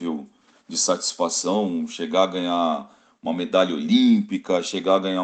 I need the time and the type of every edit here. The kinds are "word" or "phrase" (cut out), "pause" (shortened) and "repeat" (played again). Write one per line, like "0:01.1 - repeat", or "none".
none